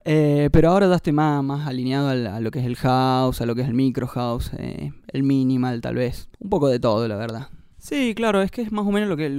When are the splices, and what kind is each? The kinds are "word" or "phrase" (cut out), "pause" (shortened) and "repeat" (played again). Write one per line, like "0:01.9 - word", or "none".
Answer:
0:06.3 - pause